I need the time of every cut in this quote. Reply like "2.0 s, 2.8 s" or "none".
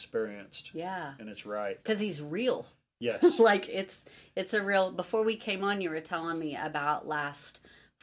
none